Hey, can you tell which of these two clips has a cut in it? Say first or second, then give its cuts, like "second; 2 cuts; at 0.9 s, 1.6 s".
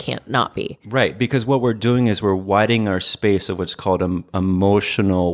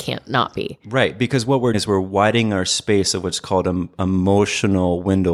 second; 1 cut; at 1.7 s